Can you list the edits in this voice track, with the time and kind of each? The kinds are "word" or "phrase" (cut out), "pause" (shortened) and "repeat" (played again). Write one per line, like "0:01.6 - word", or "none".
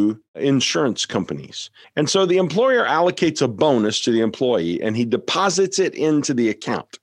0:01.8 - pause